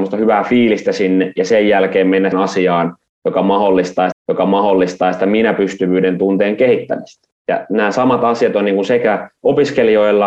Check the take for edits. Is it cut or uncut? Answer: cut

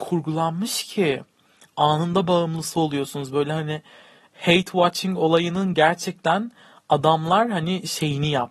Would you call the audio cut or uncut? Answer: uncut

